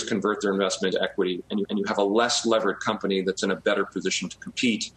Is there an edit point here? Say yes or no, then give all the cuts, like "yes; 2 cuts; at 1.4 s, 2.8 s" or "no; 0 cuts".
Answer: yes; 2 cuts; at 0.9 s, 1.6 s